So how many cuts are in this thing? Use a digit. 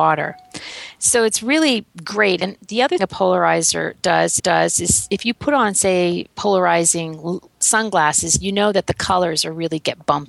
3